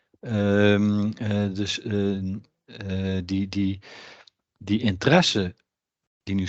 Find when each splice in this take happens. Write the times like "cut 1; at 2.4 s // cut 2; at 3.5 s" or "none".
none